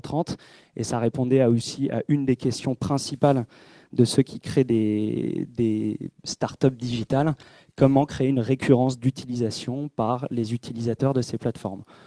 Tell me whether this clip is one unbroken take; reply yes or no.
yes